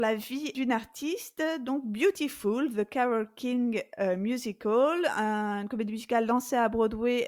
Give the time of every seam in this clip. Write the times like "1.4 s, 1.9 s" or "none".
none